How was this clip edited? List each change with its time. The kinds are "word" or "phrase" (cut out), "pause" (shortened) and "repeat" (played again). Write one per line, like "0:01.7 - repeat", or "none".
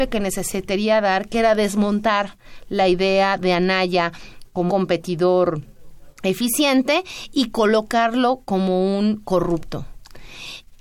0:04.7 - word